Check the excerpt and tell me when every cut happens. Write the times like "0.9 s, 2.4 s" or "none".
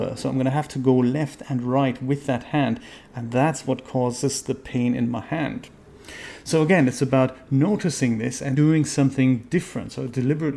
8.5 s